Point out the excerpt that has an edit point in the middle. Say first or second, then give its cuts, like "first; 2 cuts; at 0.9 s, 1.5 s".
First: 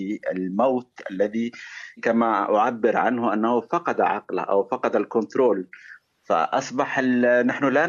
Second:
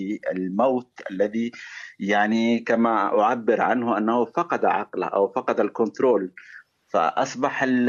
first; 1 cut; at 2.0 s